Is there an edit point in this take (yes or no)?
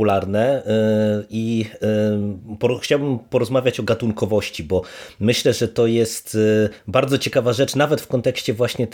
yes